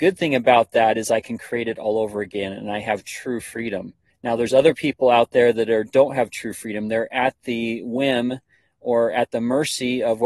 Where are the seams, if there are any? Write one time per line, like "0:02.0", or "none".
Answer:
0:04.1